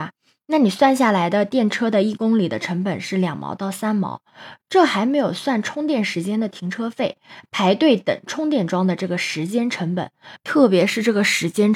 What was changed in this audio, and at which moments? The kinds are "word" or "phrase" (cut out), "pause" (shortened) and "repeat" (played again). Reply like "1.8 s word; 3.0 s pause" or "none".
10.4 s pause